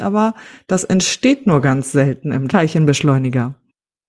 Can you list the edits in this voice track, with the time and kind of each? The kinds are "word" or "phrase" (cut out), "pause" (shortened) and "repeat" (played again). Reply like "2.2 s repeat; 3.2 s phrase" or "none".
none